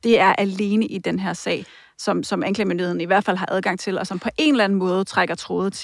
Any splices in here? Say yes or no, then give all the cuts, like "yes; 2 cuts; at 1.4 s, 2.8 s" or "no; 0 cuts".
no; 0 cuts